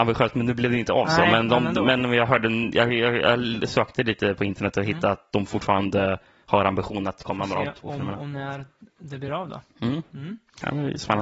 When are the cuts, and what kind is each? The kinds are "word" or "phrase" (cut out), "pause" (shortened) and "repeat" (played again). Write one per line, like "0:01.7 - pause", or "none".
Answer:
none

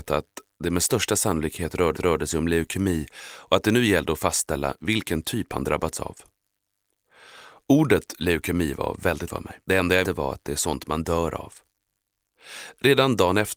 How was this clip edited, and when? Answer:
0:01.9 - repeat
0:09.3 - word
0:09.6 - pause
0:10.0 - word

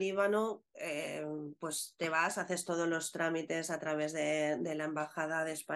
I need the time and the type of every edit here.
none

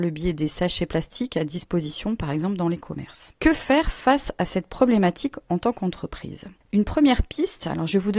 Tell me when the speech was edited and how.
0:03.3 - word

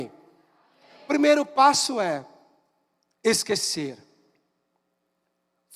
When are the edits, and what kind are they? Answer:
none

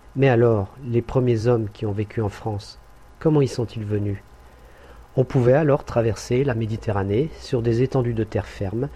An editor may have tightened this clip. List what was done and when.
none

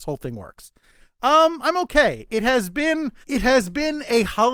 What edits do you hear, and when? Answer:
0:03.2 - pause

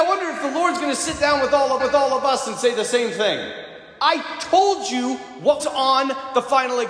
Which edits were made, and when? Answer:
0:01.8 - repeat
0:05.6 - word

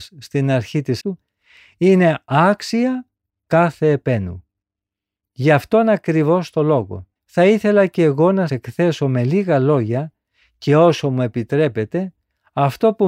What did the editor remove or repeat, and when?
0:01.0 - word
0:07.2 - pause
0:08.5 - word

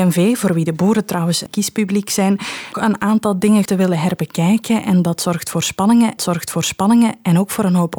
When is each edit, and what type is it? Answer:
0:01.5 - phrase
0:02.7 - phrase
0:03.7 - word
0:06.2 - repeat

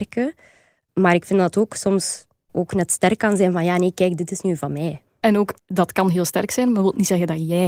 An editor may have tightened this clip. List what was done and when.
none

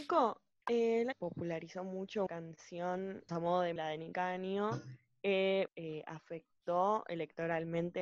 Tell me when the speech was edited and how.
0:01.1 - phrase
0:02.3 - word
0:03.3 - word
0:03.8 - word
0:04.1 - word
0:05.7 - phrase

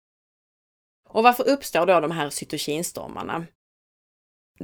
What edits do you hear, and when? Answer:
none

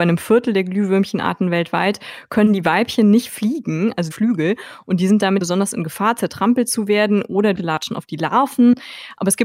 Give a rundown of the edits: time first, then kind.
0:04.1 - phrase
0:05.4 - word
0:07.6 - word

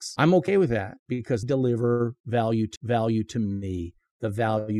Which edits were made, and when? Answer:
0:01.4 - word
0:02.8 - repeat

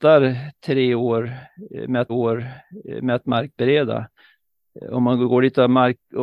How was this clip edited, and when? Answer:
0:02.1 - repeat

